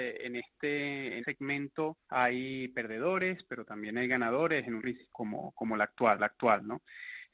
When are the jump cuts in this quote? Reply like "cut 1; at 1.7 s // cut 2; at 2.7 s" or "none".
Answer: cut 1; at 1.2 s // cut 2; at 2.0 s // cut 3; at 4.8 s // cut 4; at 5.1 s // cut 5; at 6.2 s